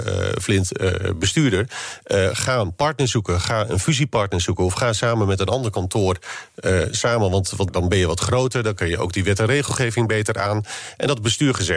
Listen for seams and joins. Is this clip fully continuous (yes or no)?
no